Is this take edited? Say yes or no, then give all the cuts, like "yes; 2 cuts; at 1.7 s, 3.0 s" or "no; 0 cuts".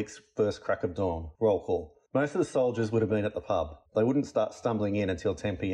yes; 3 cuts; at 1.3 s, 2.1 s, 3.9 s